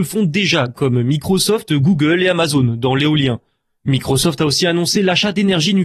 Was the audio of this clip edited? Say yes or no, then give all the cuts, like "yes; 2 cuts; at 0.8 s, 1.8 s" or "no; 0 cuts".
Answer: no; 0 cuts